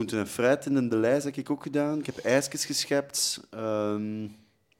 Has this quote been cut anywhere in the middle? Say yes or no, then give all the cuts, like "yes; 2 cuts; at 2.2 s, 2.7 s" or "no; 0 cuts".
no; 0 cuts